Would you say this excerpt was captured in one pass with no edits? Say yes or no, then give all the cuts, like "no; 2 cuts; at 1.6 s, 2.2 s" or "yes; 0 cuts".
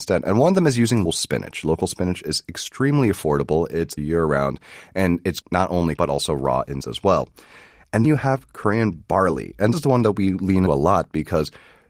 no; 8 cuts; at 1.0 s, 4.0 s, 5.4 s, 6.0 s, 6.8 s, 8.0 s, 9.7 s, 10.7 s